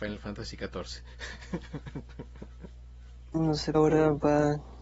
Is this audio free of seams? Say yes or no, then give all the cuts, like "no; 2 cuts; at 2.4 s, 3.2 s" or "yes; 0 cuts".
no; 1 cut; at 3.7 s